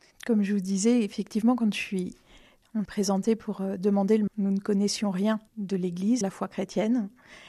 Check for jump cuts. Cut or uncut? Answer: cut